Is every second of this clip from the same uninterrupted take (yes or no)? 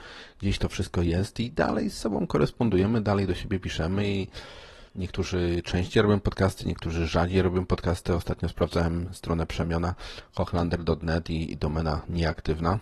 no